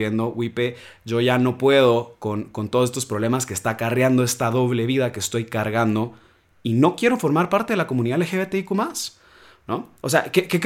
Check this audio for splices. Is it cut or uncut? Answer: uncut